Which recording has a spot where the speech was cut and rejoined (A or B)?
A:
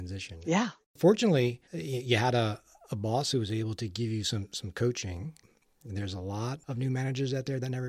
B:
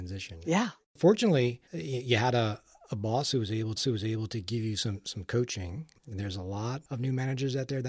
B